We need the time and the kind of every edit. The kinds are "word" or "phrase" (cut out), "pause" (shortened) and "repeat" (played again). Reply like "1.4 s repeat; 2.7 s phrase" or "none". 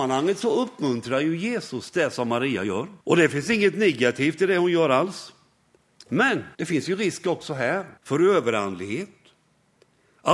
3.0 s pause; 6.5 s pause; 8.0 s pause

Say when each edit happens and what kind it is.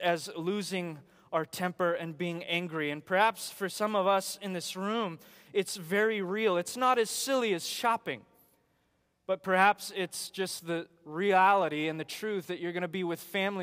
none

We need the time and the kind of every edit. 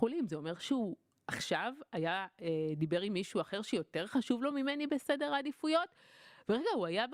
none

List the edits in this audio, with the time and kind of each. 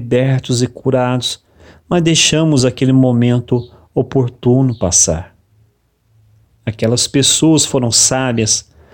none

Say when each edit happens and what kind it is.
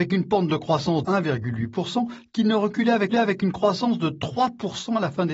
1.0 s word; 3.1 s repeat

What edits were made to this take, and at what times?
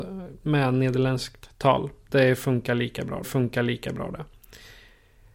3.2 s repeat

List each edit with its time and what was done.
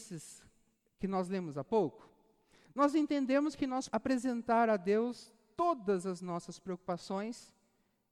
3.9 s word

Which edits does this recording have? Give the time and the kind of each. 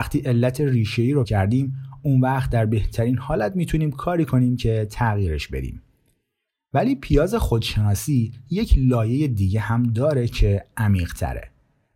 1.2 s word

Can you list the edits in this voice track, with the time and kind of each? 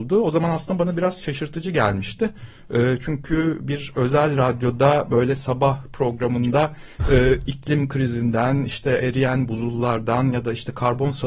none

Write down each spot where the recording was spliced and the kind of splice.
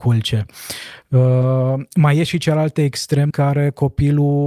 3.3 s word

